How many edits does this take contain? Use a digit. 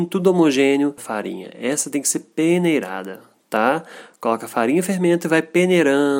1